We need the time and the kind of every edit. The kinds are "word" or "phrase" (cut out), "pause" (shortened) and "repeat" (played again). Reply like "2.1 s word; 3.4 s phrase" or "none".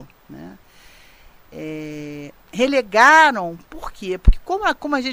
none